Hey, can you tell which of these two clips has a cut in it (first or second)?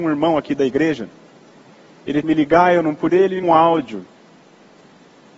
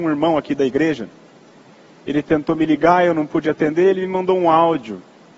first